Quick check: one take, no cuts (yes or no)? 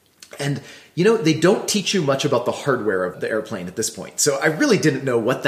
no